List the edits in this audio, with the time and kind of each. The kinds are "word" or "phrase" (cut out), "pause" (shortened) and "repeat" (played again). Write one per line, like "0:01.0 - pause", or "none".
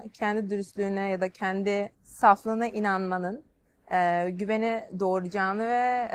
0:01.9 - pause